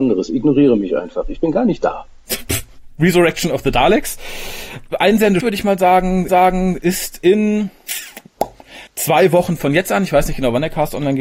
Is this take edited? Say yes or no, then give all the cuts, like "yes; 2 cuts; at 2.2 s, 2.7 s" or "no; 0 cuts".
yes; 3 cuts; at 5.4 s, 6.3 s, 8.9 s